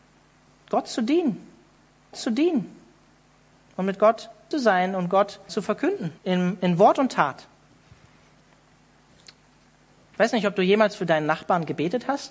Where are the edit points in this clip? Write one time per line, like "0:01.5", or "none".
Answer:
0:02.1
0:04.5
0:05.5
0:06.2